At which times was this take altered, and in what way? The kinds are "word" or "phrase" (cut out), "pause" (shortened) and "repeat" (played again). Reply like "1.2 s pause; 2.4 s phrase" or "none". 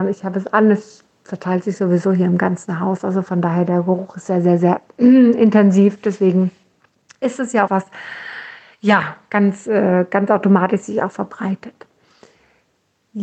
7.7 s word